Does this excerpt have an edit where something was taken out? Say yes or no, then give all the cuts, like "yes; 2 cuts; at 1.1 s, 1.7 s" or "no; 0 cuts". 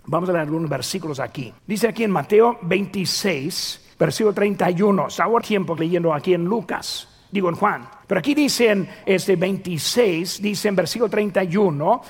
yes; 6 cuts; at 1.6 s, 3.9 s, 5.4 s, 5.8 s, 8.0 s, 9.0 s